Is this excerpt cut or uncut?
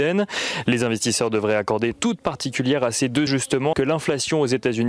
cut